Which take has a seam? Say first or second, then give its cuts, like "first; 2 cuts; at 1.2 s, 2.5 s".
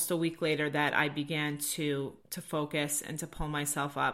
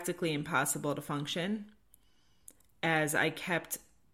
first; 1 cut; at 2.2 s